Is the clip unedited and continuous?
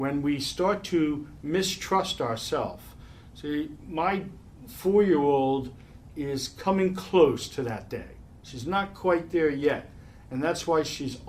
yes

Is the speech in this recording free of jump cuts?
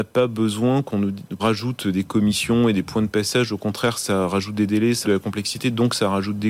no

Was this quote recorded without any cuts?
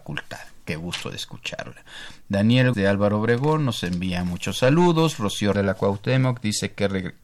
no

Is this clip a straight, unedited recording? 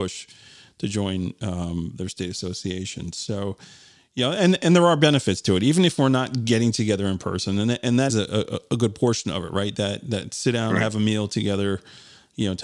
no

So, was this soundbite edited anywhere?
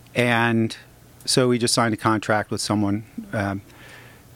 no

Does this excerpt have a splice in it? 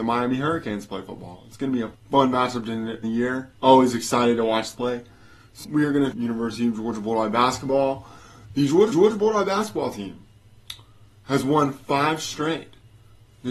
yes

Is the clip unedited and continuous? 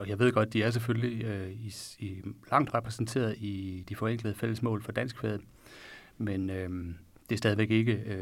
no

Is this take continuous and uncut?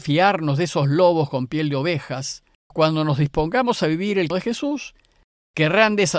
no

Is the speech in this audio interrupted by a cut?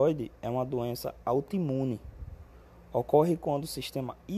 no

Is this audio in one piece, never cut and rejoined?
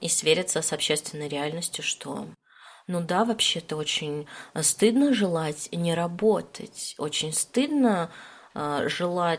yes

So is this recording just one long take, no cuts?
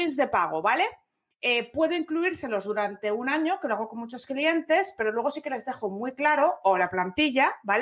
yes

